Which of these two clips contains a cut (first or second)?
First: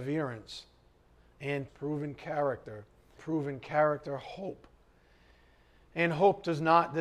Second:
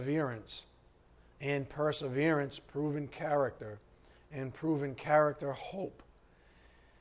first